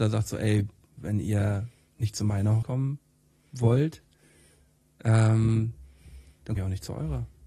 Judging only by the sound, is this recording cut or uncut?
cut